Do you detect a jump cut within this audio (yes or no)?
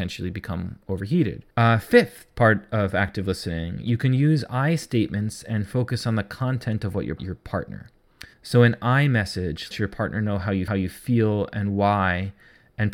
yes